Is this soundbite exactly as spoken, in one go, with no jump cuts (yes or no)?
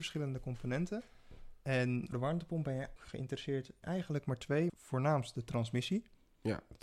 no